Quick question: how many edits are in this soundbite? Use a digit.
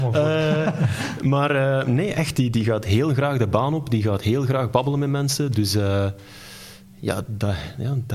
0